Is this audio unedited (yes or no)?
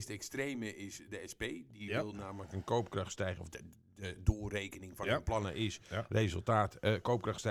yes